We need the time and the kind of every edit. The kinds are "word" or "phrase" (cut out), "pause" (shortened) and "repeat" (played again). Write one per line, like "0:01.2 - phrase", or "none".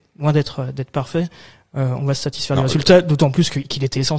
none